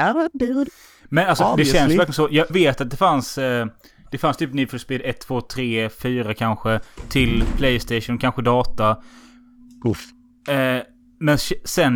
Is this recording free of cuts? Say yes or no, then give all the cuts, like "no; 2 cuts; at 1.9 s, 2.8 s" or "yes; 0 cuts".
no; 1 cut; at 2.5 s